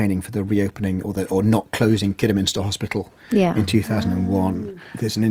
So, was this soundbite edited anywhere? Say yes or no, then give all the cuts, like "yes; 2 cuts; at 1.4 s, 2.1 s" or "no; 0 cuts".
no; 0 cuts